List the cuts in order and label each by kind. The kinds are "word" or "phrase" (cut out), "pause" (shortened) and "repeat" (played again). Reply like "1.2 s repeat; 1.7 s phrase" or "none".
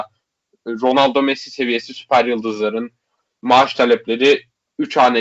none